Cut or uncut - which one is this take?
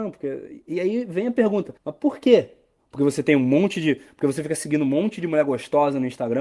cut